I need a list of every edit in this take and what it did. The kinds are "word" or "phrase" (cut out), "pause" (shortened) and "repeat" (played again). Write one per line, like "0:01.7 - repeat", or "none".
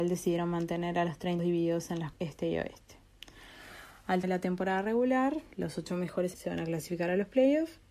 0:01.4 - word
0:02.1 - word
0:04.2 - word
0:05.5 - pause
0:06.3 - phrase